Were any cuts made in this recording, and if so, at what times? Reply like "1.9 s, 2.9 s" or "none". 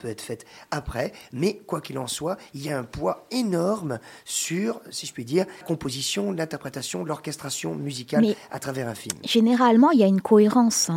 5.6 s

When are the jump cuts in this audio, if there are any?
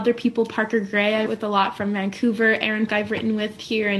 1.3 s, 2.9 s

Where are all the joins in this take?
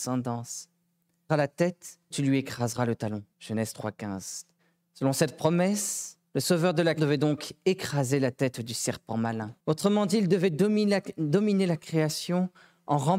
1.3 s, 2.1 s, 3.3 s, 4.6 s, 6.3 s, 7.0 s, 9.6 s

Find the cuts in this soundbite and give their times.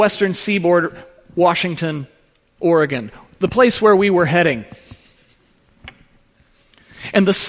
none

